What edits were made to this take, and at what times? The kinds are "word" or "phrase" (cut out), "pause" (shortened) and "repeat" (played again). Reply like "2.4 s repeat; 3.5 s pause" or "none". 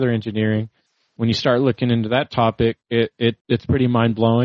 2.8 s pause; 3.4 s pause